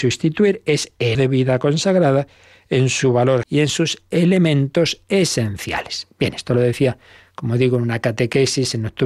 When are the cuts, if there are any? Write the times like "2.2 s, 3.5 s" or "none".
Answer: 1.1 s, 3.4 s